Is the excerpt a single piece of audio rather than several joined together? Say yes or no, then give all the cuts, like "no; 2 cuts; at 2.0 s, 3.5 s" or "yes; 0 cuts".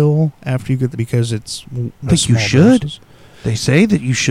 no; 2 cuts; at 0.9 s, 2.1 s